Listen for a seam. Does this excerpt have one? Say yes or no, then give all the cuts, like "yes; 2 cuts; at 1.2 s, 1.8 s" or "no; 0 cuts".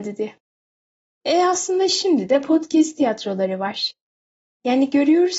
no; 0 cuts